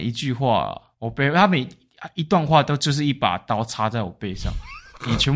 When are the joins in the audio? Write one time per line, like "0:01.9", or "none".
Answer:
0:00.9